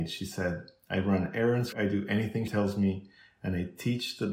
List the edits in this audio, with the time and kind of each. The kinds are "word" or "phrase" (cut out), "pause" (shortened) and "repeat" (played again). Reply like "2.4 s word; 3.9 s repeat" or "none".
1.7 s phrase; 2.5 s word